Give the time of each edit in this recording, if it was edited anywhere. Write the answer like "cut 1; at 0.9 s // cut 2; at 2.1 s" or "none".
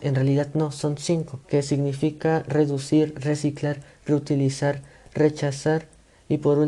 cut 1; at 1.4 s